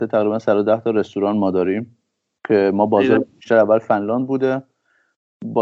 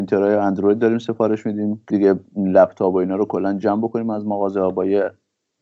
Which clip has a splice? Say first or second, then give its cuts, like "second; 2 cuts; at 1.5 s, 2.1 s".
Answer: second; 1 cut; at 1.9 s